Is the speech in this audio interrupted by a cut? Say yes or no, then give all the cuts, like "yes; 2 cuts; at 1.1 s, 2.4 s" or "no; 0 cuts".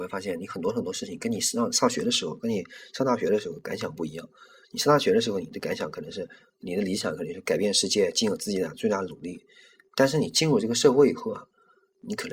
no; 0 cuts